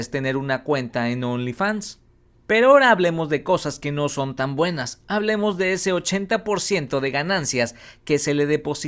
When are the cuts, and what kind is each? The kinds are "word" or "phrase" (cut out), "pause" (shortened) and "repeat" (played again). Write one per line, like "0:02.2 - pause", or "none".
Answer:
none